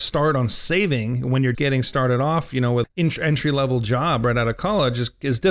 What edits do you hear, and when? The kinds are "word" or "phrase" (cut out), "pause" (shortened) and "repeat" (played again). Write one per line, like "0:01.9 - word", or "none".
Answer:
0:01.5 - word
0:02.8 - word